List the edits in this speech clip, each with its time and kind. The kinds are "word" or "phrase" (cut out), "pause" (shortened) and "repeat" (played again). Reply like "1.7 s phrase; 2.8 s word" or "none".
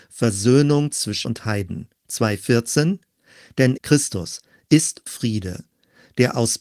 1.2 s word; 2.0 s pause; 3.8 s word; 5.1 s word